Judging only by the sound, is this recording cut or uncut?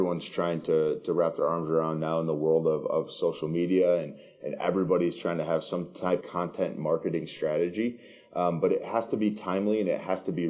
cut